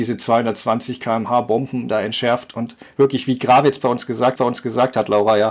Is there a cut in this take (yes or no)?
yes